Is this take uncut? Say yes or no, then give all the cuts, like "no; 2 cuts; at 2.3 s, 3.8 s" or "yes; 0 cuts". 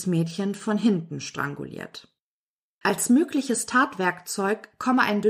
yes; 0 cuts